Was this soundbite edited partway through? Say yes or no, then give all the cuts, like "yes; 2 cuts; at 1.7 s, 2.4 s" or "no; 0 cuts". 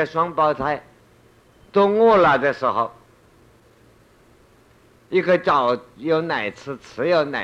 no; 0 cuts